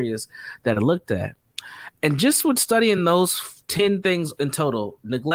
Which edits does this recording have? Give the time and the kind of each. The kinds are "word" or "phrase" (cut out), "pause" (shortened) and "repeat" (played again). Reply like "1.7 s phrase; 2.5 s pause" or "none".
none